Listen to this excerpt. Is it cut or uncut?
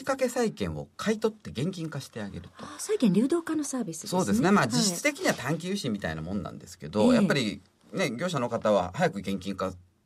uncut